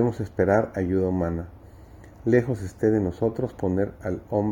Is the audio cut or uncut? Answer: uncut